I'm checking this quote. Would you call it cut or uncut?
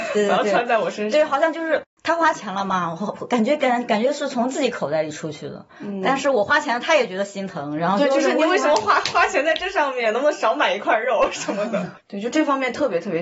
cut